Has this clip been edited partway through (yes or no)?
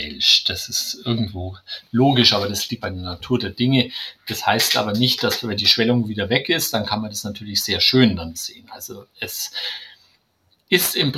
yes